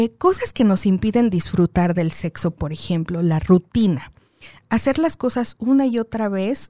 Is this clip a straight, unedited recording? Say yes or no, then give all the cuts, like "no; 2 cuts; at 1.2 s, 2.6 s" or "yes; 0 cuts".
yes; 0 cuts